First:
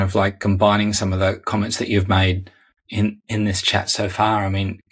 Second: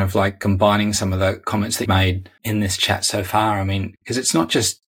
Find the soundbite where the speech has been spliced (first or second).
second